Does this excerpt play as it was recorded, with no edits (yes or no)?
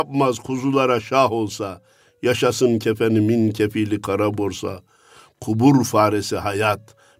yes